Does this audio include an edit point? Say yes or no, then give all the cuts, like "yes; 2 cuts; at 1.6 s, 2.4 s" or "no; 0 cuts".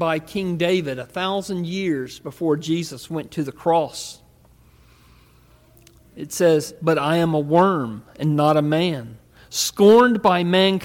no; 0 cuts